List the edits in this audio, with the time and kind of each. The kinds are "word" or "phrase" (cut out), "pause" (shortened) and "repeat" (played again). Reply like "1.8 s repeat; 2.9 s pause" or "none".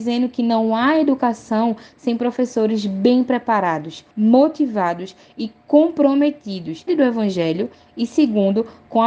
4.1 s pause; 6.9 s phrase